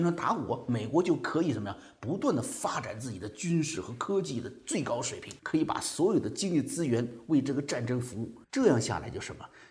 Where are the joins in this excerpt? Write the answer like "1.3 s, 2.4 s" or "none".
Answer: 5.4 s, 8.4 s